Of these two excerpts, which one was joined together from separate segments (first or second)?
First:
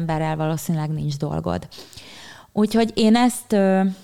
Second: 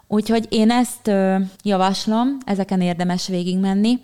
second